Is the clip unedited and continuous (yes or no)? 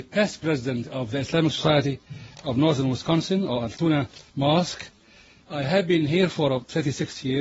no